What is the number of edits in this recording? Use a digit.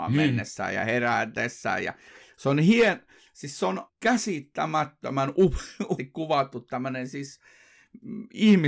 2